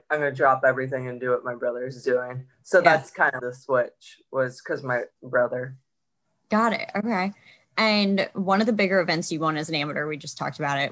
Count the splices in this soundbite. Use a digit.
2